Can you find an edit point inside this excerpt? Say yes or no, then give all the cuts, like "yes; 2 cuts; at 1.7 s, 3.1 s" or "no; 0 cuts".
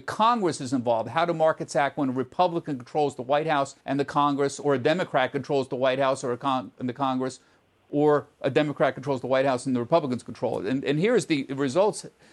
yes; 1 cut; at 3.8 s